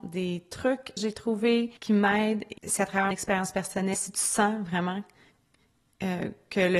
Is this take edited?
yes; 5 cuts; at 1.0 s, 1.8 s, 2.6 s, 3.1 s, 3.9 s

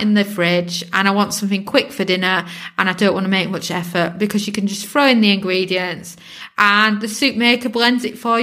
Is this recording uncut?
yes; 0 cuts

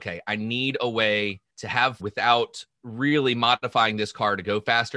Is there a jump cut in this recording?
yes; 3 cuts; at 1.5 s, 2.0 s, 2.7 s

